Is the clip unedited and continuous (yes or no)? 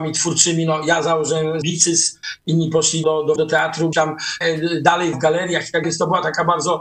no